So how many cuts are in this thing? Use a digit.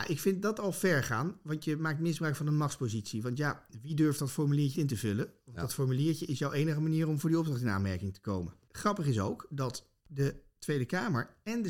1